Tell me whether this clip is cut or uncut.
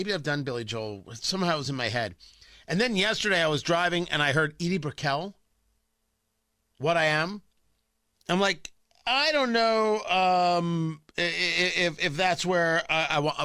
uncut